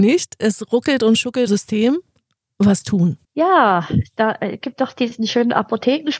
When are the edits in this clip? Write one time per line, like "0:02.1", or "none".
0:01.5
0:03.2